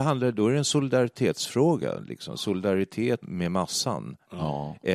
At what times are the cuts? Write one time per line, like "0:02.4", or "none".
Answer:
0:03.2